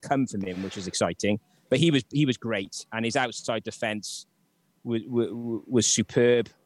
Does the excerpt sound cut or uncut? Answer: uncut